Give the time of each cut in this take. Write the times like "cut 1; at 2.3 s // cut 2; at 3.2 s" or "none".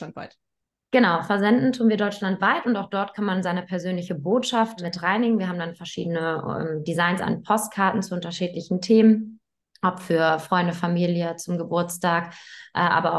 none